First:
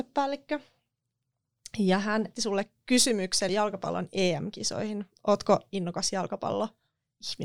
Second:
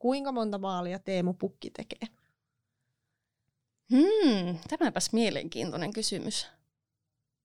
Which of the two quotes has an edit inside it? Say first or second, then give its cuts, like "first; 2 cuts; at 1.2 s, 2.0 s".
first; 2 cuts; at 2.3 s, 3.5 s